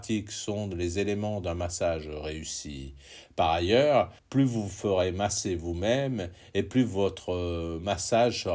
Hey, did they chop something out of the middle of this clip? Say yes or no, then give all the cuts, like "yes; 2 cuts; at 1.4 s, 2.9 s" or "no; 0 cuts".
yes; 1 cut; at 4.2 s